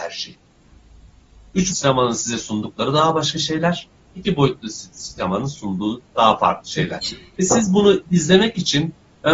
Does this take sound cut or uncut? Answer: cut